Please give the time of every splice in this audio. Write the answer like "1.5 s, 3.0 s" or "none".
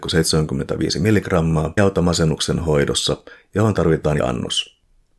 1.8 s, 4.2 s